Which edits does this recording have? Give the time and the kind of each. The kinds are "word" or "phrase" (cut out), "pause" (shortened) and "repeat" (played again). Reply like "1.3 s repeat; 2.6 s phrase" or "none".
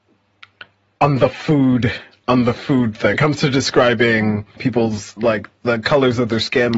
3.1 s word; 4.6 s word; 5.2 s word